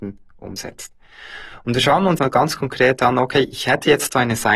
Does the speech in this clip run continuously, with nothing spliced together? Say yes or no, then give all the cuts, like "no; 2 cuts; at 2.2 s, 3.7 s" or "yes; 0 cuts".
no; 1 cut; at 2.2 s